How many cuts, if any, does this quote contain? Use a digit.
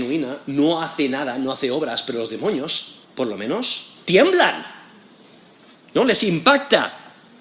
1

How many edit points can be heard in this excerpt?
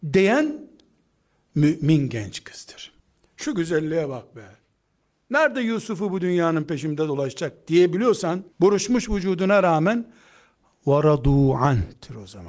2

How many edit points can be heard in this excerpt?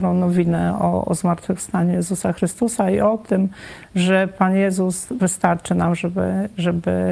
0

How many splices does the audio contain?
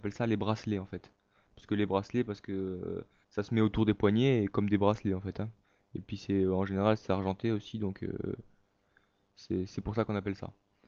1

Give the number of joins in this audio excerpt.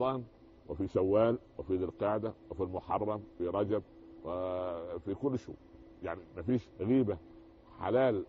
2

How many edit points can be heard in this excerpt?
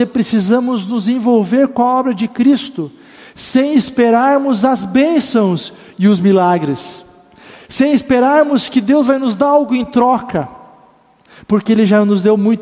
0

